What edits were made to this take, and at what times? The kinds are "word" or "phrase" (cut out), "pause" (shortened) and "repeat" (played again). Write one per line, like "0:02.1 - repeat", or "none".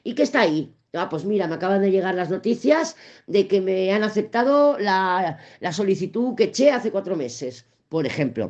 none